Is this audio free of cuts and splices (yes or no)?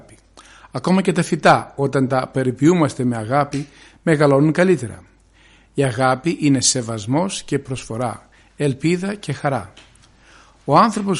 yes